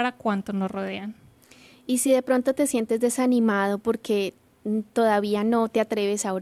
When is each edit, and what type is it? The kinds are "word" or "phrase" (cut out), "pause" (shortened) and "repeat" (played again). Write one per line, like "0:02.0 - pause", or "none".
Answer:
none